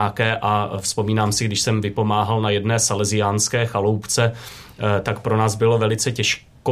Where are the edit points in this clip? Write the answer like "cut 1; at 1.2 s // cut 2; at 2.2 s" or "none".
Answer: none